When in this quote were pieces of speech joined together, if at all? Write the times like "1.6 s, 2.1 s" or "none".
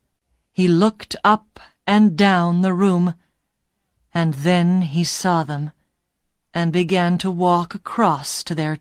none